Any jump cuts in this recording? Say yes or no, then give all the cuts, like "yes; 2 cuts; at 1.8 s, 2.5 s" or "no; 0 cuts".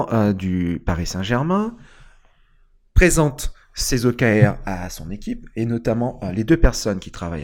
no; 0 cuts